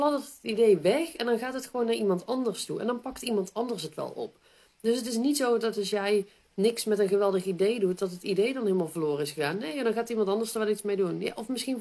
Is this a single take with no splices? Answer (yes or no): yes